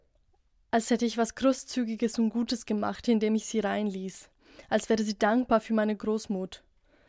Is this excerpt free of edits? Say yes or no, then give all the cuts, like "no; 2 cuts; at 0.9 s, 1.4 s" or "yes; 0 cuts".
yes; 0 cuts